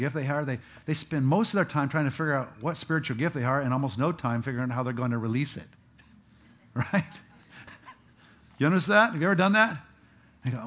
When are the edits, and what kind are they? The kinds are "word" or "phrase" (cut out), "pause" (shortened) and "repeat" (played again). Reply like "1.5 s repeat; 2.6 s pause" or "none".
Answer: none